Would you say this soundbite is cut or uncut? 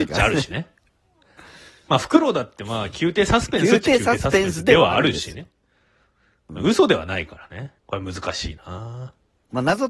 cut